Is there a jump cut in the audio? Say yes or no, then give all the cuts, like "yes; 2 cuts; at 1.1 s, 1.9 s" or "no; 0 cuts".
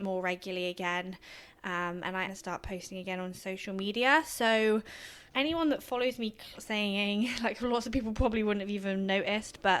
yes; 3 cuts; at 2.3 s, 5.3 s, 6.6 s